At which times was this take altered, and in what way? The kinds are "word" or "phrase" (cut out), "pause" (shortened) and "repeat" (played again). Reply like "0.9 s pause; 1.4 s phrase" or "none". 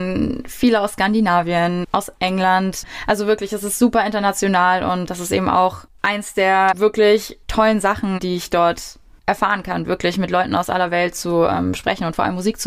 none